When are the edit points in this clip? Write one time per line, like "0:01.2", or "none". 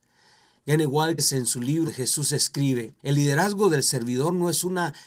0:01.2
0:01.9
0:03.0